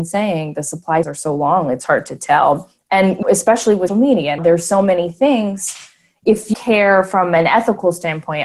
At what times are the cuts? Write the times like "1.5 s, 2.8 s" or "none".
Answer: 1.0 s, 3.2 s, 3.9 s, 4.4 s, 6.2 s, 6.5 s

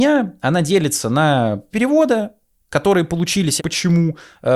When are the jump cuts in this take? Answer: 1.7 s, 3.6 s

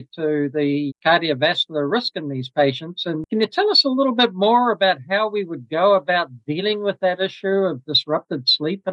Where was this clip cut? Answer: none

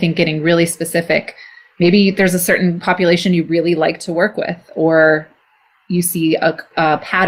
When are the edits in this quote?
none

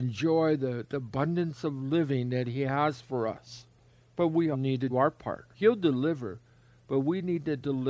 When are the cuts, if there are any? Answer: 3.9 s, 4.5 s, 4.9 s, 5.5 s

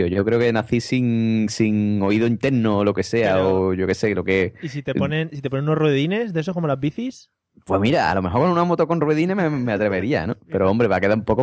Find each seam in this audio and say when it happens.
none

